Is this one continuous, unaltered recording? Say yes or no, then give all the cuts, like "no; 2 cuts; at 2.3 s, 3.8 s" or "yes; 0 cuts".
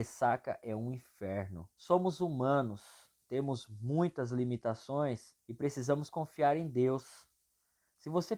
no; 2 cuts; at 1.7 s, 5.4 s